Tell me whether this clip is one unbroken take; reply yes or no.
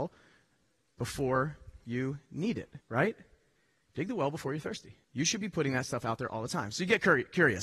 no